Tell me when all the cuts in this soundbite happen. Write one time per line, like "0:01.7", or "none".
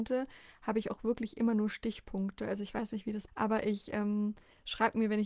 0:03.3